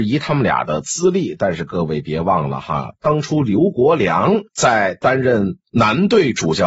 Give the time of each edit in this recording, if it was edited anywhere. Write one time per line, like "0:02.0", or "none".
0:04.5
0:05.6